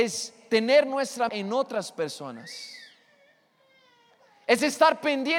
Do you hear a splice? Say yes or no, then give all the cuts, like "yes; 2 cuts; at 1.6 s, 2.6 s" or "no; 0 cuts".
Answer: yes; 1 cut; at 1.3 s